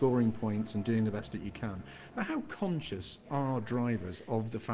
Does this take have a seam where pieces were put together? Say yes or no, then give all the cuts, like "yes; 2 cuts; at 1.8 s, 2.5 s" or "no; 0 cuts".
no; 0 cuts